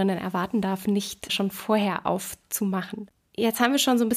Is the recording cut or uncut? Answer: cut